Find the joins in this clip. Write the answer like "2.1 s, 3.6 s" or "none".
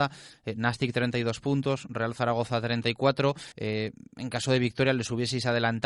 3.5 s

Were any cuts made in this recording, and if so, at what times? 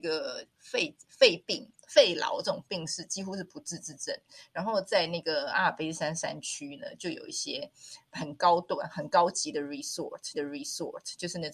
10.3 s

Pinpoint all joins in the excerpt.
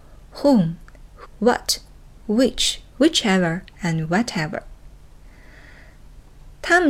1.2 s, 3.0 s

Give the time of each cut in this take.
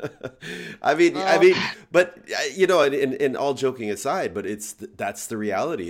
none

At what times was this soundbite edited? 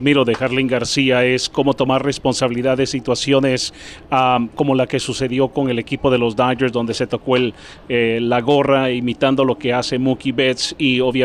none

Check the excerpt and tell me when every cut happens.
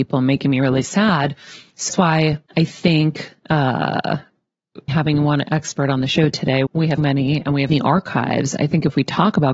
1.9 s, 2.5 s, 4.9 s, 6.7 s, 7.0 s, 7.7 s

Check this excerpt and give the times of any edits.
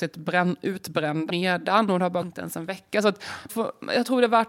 1.3 s, 2.2 s, 3.5 s

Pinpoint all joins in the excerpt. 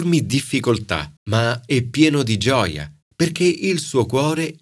1.2 s, 3.0 s

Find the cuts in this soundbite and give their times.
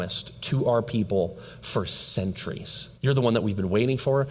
3.0 s

